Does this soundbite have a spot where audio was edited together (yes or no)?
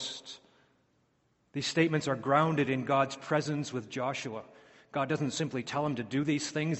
no